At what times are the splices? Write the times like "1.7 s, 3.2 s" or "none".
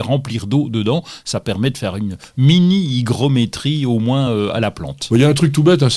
none